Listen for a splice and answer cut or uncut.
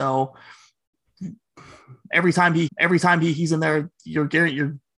cut